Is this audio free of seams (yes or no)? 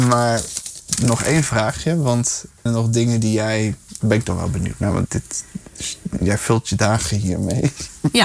no